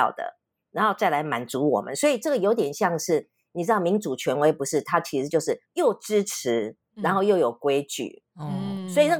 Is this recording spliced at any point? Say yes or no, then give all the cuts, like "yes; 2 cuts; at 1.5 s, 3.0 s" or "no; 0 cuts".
no; 0 cuts